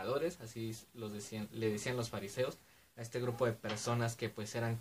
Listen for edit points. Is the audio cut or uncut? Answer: uncut